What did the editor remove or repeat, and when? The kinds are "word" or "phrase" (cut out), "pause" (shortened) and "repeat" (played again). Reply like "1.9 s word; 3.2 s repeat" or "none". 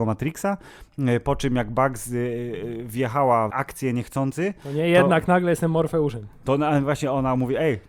3.5 s word